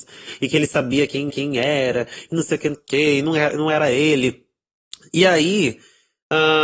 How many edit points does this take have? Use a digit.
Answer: 2